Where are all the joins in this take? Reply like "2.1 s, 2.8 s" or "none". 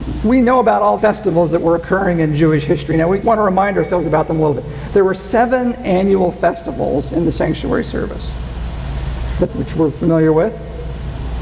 1.0 s, 3.2 s, 9.5 s